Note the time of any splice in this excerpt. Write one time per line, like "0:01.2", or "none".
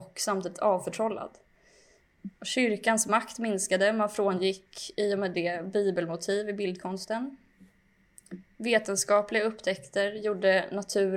0:02.4